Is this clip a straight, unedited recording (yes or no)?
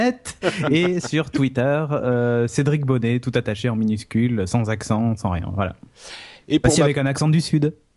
yes